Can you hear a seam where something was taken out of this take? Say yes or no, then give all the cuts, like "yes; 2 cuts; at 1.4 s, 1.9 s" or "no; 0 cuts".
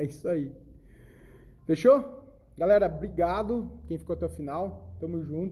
no; 0 cuts